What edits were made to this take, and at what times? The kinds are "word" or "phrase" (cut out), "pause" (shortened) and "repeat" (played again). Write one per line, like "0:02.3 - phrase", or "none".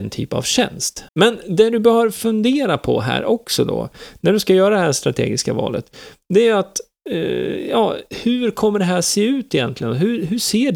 0:01.1 - pause